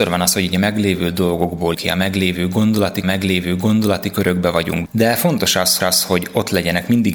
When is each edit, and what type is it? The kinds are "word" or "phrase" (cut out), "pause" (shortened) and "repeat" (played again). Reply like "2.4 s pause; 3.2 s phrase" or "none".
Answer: 1.7 s word; 3.0 s repeat; 4.9 s word; 5.8 s repeat